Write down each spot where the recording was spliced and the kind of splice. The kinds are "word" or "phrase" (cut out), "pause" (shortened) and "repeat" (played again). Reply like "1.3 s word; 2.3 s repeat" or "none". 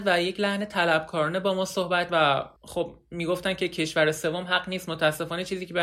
2.1 s word; 2.6 s pause

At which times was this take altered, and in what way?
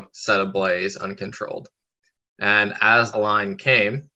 3.1 s word

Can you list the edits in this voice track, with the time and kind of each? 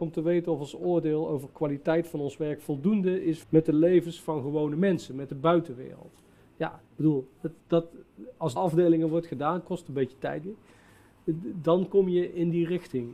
3.4 s word; 6.9 s pause; 7.6 s pause; 8.6 s phrase; 10.4 s word

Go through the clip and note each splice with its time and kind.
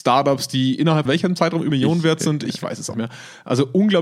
1.1 s word; 1.7 s word; 2.9 s word

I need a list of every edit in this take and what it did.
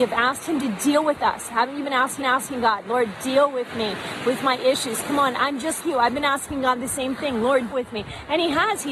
2.2 s repeat; 5.8 s word; 7.7 s word

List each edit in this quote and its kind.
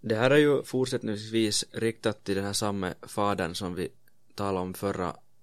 none

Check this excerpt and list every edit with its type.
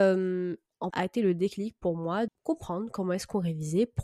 0.9 s word; 2.3 s word

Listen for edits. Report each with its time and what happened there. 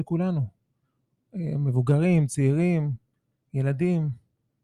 none

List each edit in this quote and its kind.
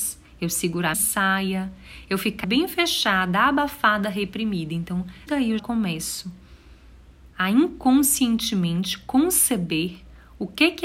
0.9 s word; 2.4 s phrase; 5.3 s word; 5.6 s word; 7.3 s pause

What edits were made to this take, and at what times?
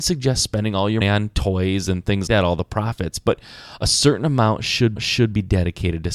1.0 s word; 2.3 s word; 5.0 s repeat

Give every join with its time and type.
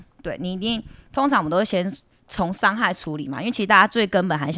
none

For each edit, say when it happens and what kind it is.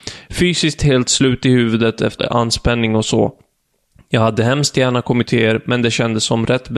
2.2 s word; 5.3 s word

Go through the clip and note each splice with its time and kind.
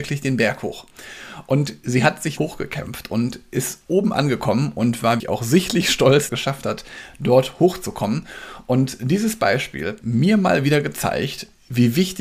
2.4 s word; 5.2 s word; 6.3 s phrase; 10.0 s word

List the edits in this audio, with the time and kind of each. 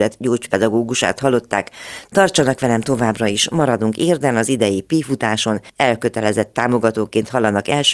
5.7 s pause

